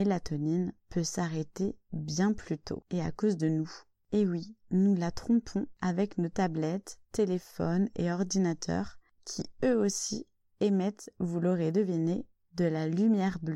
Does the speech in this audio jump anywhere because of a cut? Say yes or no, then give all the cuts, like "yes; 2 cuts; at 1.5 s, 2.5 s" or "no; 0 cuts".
no; 0 cuts